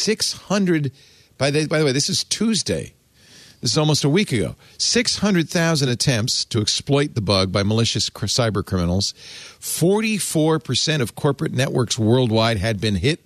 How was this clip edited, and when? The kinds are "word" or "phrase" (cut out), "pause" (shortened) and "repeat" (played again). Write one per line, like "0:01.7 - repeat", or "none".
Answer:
none